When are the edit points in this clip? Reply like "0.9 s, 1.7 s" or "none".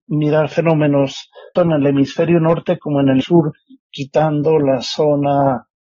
1.6 s, 3.2 s